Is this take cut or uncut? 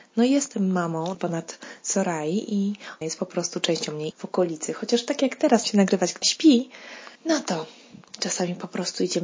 cut